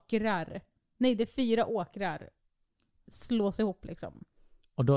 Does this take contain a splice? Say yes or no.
no